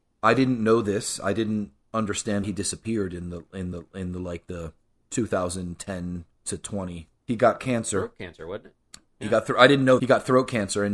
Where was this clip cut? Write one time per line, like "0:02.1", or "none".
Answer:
0:02.4
0:03.7
0:06.3
0:07.2
0:10.0